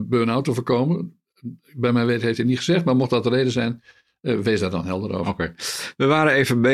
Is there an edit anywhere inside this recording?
no; 0 cuts

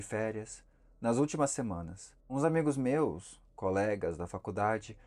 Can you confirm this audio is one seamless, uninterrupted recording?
no; 1 cut; at 2.2 s

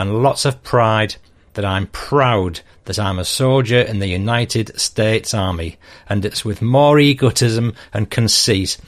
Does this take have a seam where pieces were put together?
no; 0 cuts

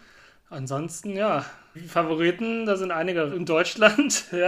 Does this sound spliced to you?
yes; 2 cuts; at 1.7 s, 3.3 s

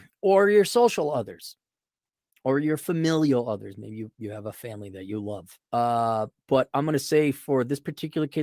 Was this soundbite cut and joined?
yes; 1 cut; at 5.6 s

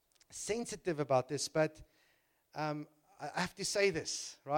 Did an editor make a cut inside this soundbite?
no; 0 cuts

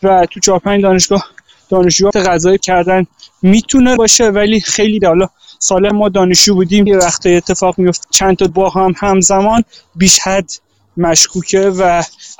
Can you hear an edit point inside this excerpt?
yes; 9 cuts; at 2.1 s, 2.6 s, 4.0 s, 5.0 s, 5.9 s, 6.9 s, 8.0 s, 8.5 s, 10.2 s

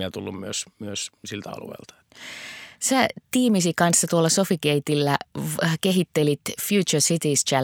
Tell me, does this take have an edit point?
yes; 1 cut; at 1.2 s

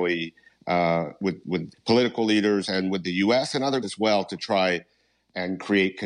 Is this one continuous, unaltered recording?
no; 2 cuts; at 1.7 s, 3.8 s

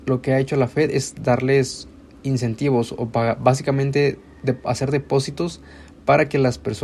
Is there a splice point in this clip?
no; 0 cuts

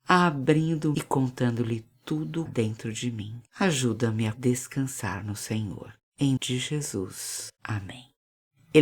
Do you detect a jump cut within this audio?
yes; 5 cuts; at 0.9 s, 2.5 s, 3.5 s, 4.3 s, 6.4 s

